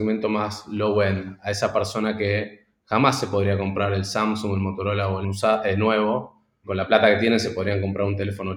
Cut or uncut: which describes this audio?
cut